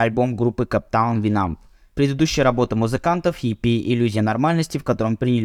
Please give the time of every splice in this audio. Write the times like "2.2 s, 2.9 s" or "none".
none